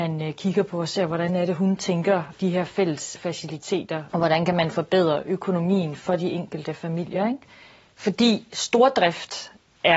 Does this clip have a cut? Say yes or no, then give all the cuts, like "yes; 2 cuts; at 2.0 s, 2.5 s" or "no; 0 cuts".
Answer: no; 0 cuts